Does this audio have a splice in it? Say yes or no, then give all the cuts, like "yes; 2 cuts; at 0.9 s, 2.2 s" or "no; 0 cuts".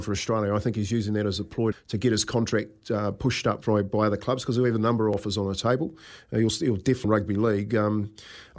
yes; 2 cuts; at 1.7 s, 7.0 s